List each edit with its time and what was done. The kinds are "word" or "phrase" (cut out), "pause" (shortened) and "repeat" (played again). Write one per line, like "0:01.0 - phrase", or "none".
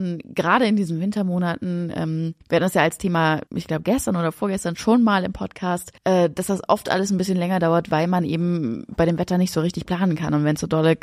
0:02.4 - pause
0:03.5 - pause
0:06.0 - pause